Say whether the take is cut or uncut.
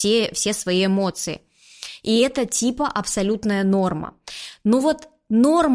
uncut